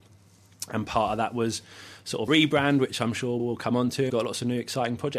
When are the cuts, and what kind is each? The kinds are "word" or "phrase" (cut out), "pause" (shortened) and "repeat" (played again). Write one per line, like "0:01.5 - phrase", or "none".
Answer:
0:02.3 - word
0:03.4 - word
0:04.1 - word